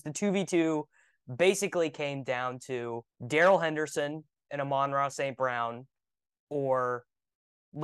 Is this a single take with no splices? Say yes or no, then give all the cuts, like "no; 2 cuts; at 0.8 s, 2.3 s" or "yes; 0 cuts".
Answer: no; 1 cut; at 3.1 s